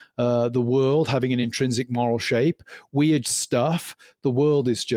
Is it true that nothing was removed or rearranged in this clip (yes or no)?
no